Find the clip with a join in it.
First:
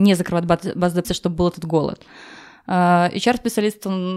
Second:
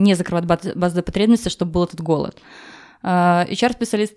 first; 1 cut; at 1.0 s

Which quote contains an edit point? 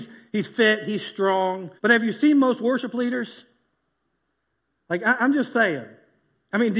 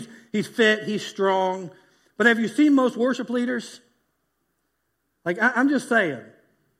first; 1 cut; at 1.8 s

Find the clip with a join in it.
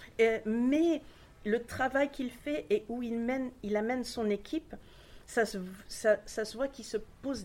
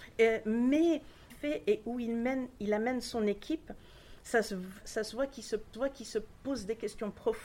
second; 3 cuts; at 1.3 s, 4.8 s, 5.7 s

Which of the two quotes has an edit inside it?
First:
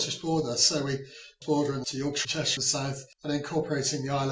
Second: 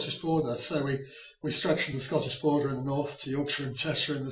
first; 5 cuts; at 1.4 s, 1.8 s, 2.2 s, 2.6 s, 3.1 s

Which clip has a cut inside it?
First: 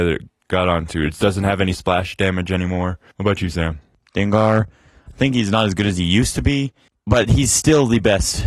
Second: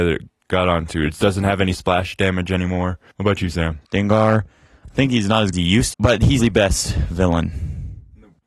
second; 4 cuts; at 3.8 s, 5.5 s, 5.9 s, 6.4 s

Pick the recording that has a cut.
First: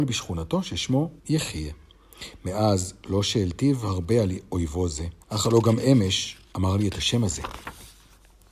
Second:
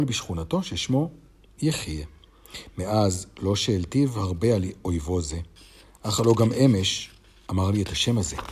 first; 3 cuts; at 1.2 s, 5.2 s, 6.4 s

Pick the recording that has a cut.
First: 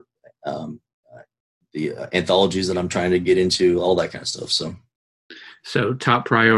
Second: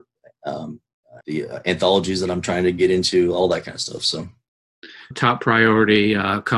second; 2 cuts; at 1.2 s, 5.1 s

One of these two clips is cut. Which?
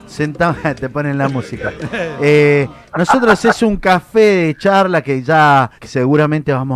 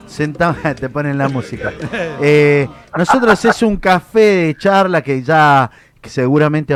first; 1 cut; at 5.8 s

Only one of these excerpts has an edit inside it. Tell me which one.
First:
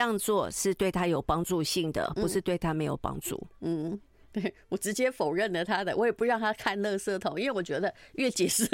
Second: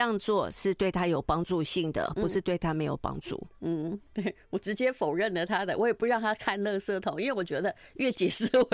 second; 1 cut; at 4.1 s

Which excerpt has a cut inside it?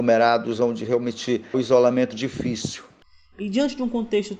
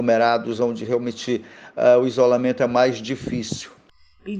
first; 2 cuts; at 1.5 s, 2.1 s

